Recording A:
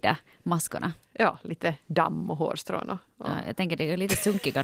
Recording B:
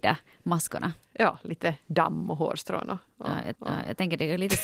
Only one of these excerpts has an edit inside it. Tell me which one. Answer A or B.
B